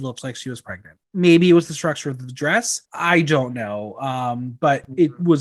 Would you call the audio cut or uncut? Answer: cut